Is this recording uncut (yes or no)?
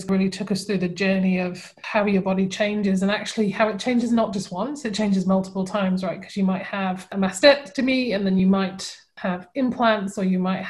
yes